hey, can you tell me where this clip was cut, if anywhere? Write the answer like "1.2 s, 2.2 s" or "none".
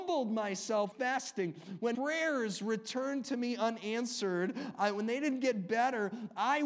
0.9 s, 1.9 s